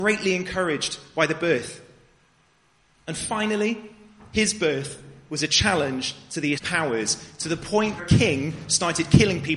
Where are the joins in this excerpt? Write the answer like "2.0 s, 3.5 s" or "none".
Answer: 6.6 s, 8.0 s